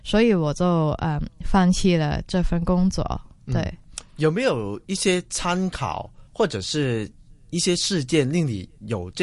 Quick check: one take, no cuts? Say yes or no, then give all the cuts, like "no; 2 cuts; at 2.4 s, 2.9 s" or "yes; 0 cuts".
no; 1 cut; at 6.3 s